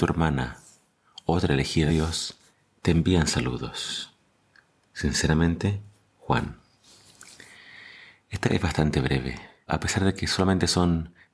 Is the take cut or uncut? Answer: cut